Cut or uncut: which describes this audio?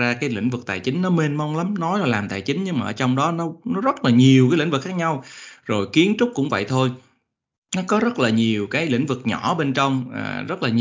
uncut